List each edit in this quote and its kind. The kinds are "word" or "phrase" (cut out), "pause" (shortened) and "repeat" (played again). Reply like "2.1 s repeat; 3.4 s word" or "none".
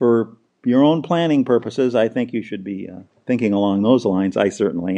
none